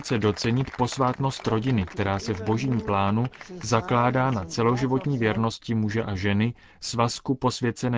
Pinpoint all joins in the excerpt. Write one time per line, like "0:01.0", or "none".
none